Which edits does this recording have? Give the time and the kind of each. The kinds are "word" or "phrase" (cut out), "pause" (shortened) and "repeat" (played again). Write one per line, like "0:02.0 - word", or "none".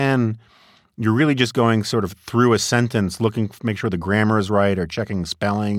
none